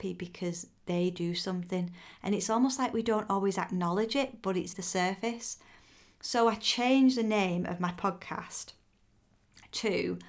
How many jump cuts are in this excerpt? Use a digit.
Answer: 1